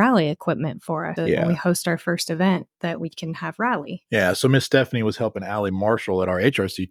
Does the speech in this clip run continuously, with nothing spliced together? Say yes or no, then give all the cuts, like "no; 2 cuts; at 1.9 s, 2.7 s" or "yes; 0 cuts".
no; 1 cut; at 1.2 s